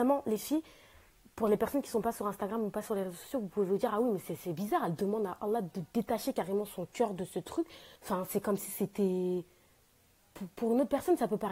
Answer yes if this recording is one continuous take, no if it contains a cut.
no